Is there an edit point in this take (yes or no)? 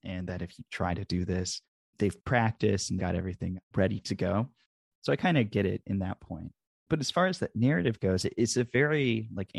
yes